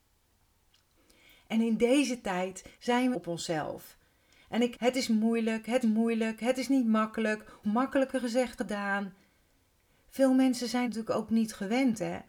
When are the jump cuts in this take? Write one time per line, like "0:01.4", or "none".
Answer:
0:02.7
0:03.1
0:04.7
0:05.8
0:07.6
0:08.6
0:10.8